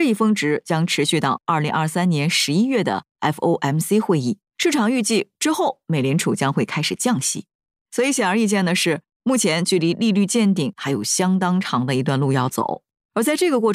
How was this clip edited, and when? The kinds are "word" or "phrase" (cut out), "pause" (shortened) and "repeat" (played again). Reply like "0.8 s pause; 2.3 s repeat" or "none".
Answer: 4.5 s pause